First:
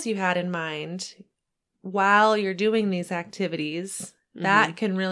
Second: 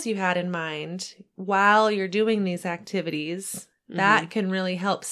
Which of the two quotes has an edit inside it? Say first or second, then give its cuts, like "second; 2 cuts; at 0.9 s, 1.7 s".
second; 1 cut; at 1.3 s